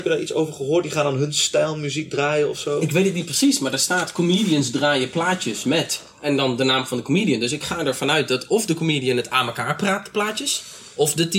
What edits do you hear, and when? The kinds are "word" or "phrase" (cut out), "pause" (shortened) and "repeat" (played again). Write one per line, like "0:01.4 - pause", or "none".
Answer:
none